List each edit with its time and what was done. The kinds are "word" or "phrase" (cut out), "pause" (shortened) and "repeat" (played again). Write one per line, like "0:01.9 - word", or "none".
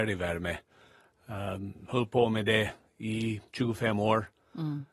0:03.5 - pause